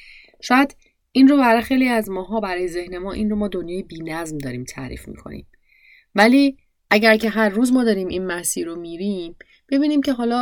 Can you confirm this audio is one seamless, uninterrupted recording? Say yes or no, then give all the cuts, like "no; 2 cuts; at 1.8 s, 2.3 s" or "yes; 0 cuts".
yes; 0 cuts